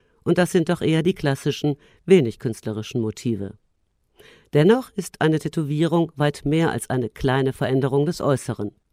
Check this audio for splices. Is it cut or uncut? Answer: uncut